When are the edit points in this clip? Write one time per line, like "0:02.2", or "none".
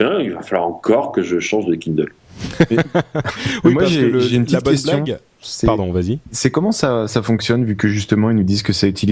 0:02.2